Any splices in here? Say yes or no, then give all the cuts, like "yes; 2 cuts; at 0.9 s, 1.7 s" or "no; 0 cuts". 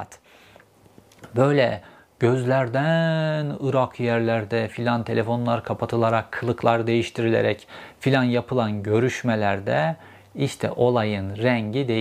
no; 0 cuts